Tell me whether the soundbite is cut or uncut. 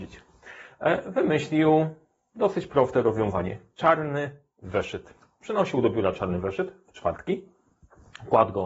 uncut